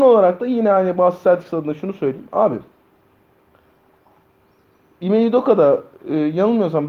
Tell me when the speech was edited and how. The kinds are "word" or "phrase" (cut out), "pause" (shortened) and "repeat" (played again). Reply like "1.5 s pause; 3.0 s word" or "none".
none